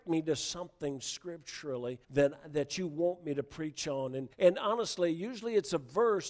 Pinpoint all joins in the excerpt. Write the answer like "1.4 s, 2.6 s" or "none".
2.0 s, 4.3 s